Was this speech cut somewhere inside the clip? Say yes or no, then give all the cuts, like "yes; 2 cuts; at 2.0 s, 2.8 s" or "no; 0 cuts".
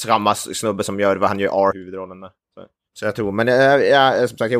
yes; 1 cut; at 1.7 s